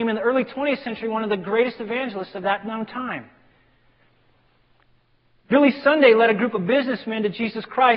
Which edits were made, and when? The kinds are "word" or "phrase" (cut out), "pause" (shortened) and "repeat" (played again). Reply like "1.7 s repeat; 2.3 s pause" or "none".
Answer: none